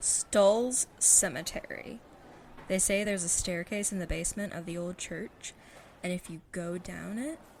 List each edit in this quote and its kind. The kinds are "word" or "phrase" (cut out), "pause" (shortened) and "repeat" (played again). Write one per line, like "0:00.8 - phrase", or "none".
none